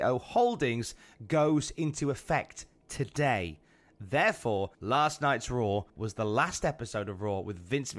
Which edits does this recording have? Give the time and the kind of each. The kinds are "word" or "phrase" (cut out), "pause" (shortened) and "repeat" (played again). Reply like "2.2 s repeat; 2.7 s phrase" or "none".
4.7 s pause; 5.9 s pause